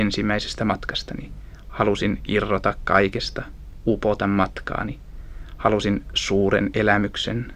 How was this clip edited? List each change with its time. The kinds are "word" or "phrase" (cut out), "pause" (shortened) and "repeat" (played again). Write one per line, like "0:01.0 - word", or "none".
none